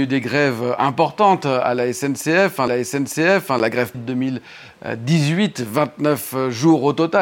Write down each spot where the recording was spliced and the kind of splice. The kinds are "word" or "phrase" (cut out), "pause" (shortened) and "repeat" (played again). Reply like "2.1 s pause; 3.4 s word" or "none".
2.7 s repeat; 3.9 s word